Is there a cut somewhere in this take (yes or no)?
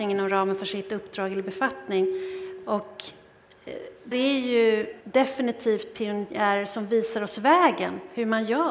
yes